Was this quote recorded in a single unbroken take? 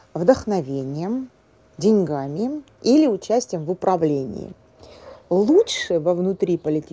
yes; 0 cuts

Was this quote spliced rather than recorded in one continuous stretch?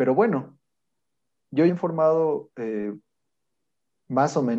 yes; 1 cut; at 1.7 s

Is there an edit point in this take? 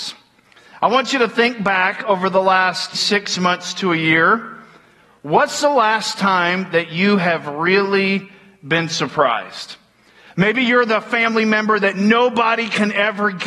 yes; 1 cut; at 2.9 s

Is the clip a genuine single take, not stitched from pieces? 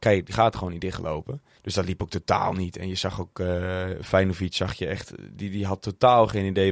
no; 1 cut; at 1.6 s

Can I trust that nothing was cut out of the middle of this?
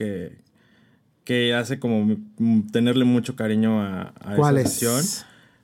yes; 0 cuts

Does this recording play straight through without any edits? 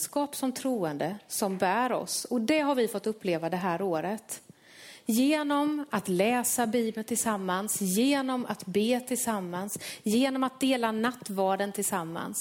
yes; 0 cuts

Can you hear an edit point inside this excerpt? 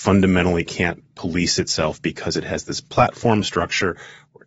no; 0 cuts

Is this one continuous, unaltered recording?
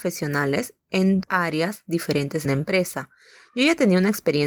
no; 2 cuts; at 1.2 s, 2.5 s

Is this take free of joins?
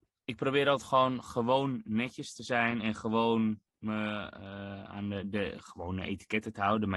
yes; 0 cuts

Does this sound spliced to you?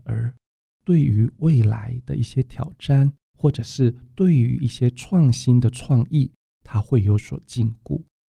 no; 0 cuts

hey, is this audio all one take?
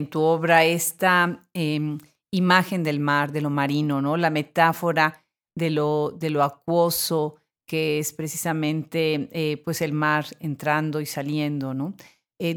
yes; 0 cuts

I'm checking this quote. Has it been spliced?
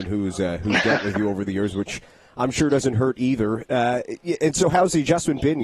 no; 0 cuts

